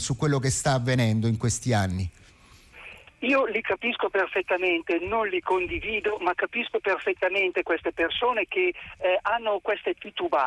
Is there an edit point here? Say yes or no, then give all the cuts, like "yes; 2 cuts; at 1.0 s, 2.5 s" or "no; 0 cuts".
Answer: no; 0 cuts